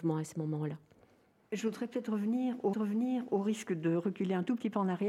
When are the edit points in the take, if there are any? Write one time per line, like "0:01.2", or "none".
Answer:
0:02.7